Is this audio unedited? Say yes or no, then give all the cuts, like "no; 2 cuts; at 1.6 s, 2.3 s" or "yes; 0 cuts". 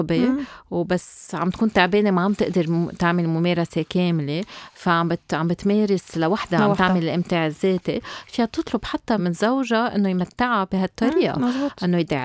no; 1 cut; at 9.2 s